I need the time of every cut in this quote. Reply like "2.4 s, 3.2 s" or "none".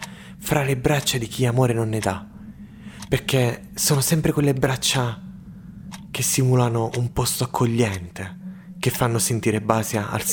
none